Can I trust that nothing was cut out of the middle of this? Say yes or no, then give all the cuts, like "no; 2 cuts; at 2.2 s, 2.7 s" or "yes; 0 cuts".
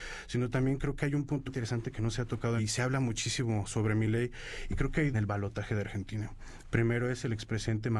no; 3 cuts; at 1.5 s, 2.6 s, 5.1 s